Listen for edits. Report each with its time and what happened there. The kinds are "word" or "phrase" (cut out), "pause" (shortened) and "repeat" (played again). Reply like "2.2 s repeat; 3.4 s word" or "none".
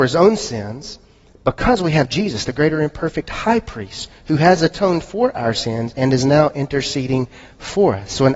none

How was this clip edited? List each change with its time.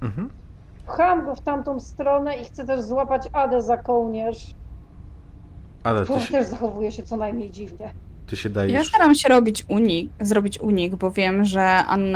none

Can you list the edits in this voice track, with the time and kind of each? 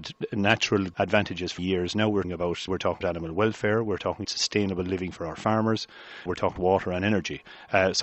0.9 s word; 1.6 s word; 2.2 s word; 2.7 s word; 3.0 s word; 4.2 s word; 6.3 s word; 6.6 s word

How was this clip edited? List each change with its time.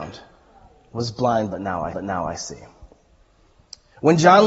1.9 s repeat

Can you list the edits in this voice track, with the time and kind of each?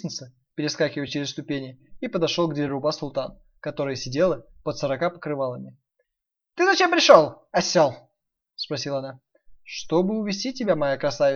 none

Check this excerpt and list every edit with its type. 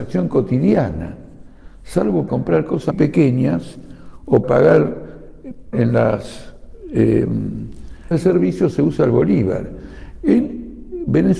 2.3 s word; 2.9 s word; 4.4 s word; 5.7 s word; 8.1 s word

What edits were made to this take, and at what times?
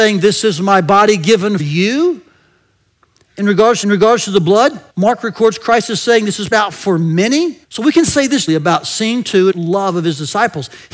1.6 s word; 3.8 s repeat; 4.9 s pause; 6.5 s word; 7.6 s pause; 8.5 s word; 9.5 s phrase

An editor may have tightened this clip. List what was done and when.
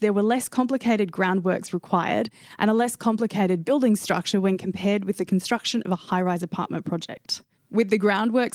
none

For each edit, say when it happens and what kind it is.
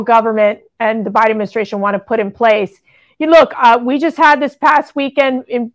none

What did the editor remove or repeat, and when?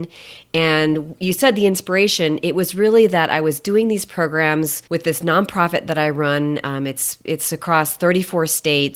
4.9 s pause

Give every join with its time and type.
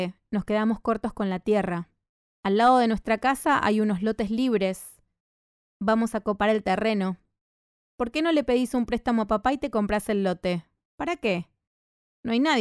none

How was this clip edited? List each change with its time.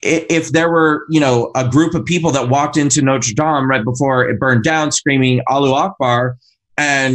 none

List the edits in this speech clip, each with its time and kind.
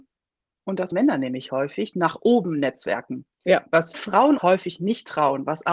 0.9 s word; 1.9 s word; 3.9 s word; 4.4 s word

